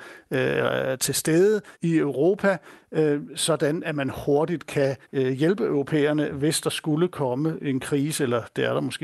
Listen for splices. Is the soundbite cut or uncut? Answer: cut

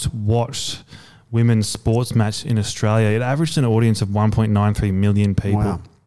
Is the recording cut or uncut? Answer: uncut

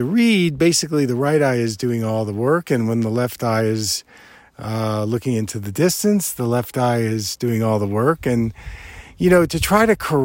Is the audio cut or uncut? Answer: uncut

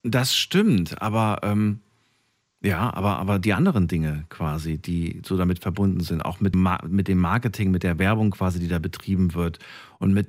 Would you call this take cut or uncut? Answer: cut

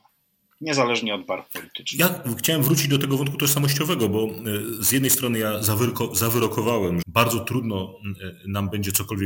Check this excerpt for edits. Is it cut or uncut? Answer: cut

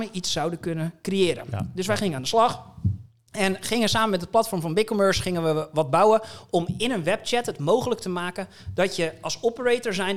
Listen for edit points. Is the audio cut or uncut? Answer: uncut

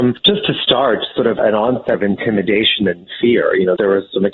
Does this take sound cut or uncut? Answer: cut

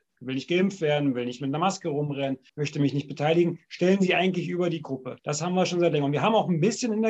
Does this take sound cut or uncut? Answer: cut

